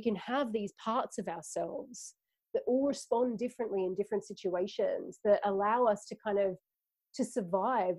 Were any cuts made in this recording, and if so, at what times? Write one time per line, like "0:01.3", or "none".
none